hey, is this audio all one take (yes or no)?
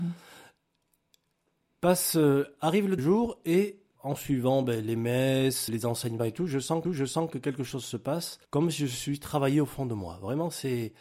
no